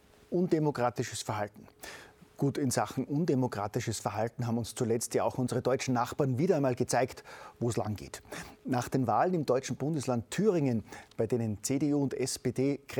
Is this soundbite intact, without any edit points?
yes; 0 cuts

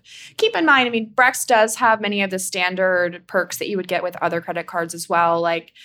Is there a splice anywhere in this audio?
no; 0 cuts

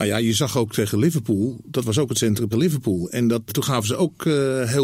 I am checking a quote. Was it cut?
yes; 2 cuts; at 2.5 s, 3.5 s

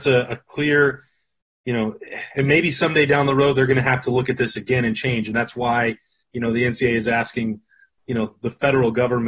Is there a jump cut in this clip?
no; 0 cuts

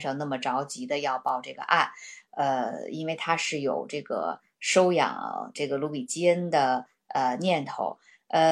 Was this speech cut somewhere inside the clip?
no; 0 cuts

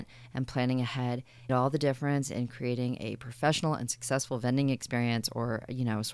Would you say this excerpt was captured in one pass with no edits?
no; 1 cut; at 1.5 s

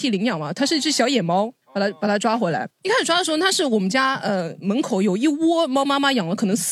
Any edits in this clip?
yes; 2 cuts; at 1.6 s, 2.7 s

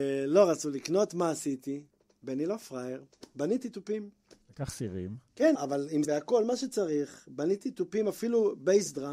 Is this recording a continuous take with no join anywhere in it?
no; 3 cuts; at 4.4 s, 5.5 s, 6.0 s

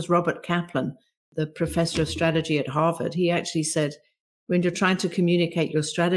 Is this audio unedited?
yes; 0 cuts

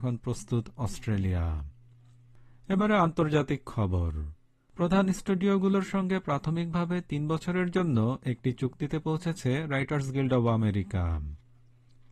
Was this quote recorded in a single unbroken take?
yes; 0 cuts

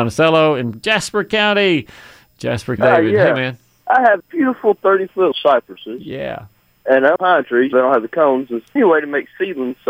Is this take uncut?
no; 6 cuts; at 2.8 s, 4.2 s, 5.3 s, 7.2 s, 7.7 s, 8.8 s

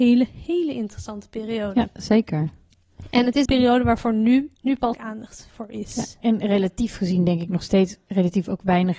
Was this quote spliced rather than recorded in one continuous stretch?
yes; 4 cuts; at 3.5 s, 4.6 s, 4.9 s, 6.2 s

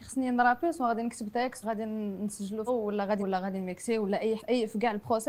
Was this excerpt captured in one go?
no; 4 cuts; at 1.6 s, 2.7 s, 3.2 s, 4.4 s

